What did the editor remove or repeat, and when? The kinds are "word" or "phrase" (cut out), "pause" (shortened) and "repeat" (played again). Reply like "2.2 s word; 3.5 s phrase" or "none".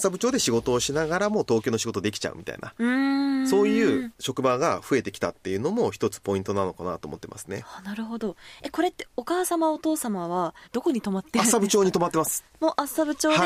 10.6 s pause